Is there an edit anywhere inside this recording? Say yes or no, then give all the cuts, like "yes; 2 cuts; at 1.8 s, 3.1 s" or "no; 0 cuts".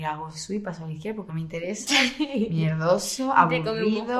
yes; 1 cut; at 1.3 s